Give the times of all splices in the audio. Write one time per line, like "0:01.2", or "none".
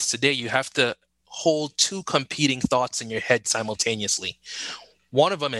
none